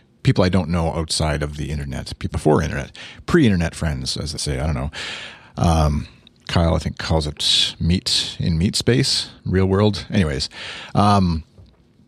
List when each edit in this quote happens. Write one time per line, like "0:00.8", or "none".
0:02.3
0:04.4
0:06.4
0:09.4

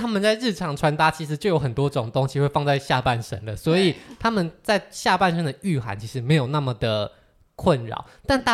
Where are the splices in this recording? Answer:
none

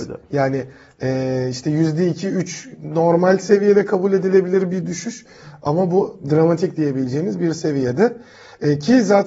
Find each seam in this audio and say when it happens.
none

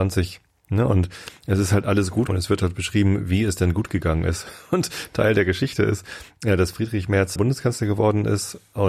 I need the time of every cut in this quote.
0:02.3
0:07.4

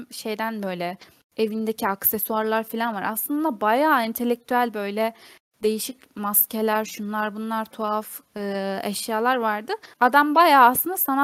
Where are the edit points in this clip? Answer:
0:09.9

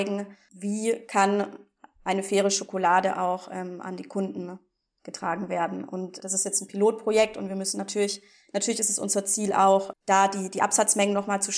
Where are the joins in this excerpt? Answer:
0:06.2
0:09.9

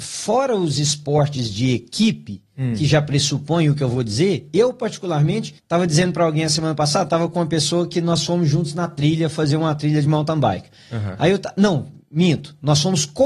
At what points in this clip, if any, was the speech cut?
0:05.6

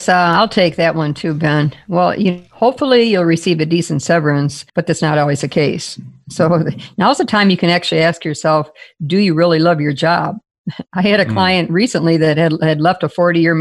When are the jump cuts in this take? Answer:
0:02.5
0:04.7

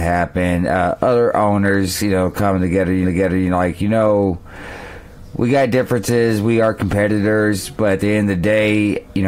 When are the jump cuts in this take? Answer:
0:03.0

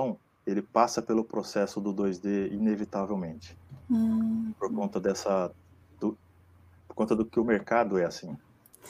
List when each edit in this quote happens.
0:03.8

